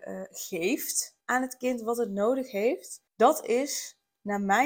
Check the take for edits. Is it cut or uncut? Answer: cut